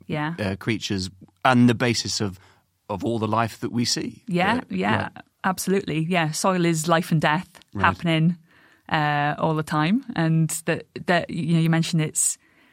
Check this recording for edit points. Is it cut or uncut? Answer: uncut